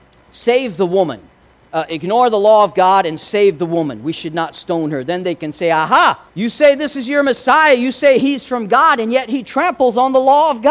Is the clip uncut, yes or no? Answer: no